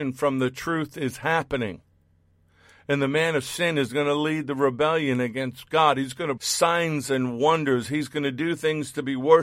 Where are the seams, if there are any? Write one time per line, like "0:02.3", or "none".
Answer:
0:06.4